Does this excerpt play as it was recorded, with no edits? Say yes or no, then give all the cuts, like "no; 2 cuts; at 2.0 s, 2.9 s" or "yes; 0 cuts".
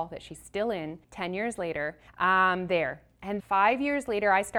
no; 3 cuts; at 1.0 s, 2.1 s, 3.4 s